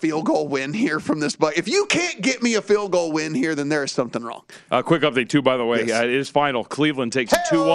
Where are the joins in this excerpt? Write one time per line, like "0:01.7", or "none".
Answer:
none